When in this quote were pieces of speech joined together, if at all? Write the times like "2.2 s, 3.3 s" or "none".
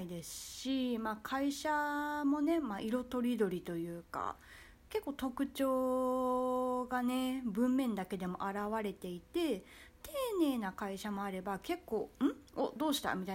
none